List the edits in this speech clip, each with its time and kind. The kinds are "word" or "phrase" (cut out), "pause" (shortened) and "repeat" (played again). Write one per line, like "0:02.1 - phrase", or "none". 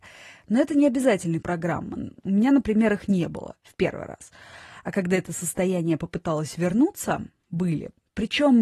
0:01.4 - word